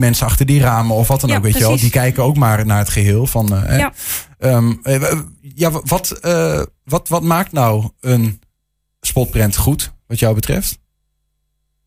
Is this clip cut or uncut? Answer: uncut